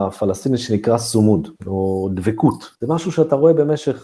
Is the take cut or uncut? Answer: cut